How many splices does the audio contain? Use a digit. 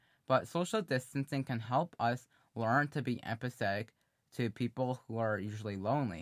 0